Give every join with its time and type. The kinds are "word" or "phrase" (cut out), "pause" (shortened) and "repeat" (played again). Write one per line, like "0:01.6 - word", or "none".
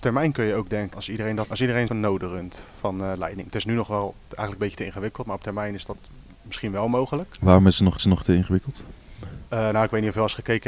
0:00.9 - word
0:01.5 - word
0:01.9 - word
0:08.0 - repeat